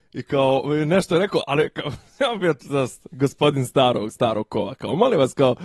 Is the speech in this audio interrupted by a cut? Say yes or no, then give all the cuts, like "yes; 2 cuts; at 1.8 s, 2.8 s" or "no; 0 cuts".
no; 0 cuts